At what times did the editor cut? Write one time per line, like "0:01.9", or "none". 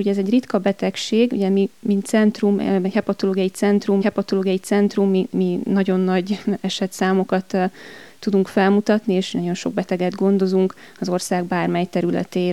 0:04.0